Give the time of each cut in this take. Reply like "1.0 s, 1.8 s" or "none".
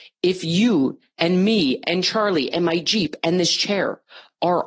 none